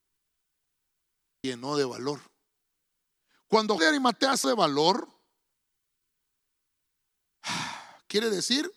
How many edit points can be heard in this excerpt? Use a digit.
3